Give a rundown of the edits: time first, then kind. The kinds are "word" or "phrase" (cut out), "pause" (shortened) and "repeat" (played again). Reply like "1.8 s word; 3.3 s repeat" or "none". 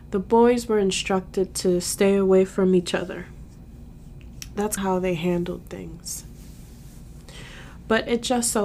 4.8 s phrase